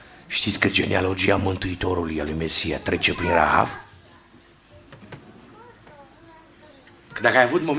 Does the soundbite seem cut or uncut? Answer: uncut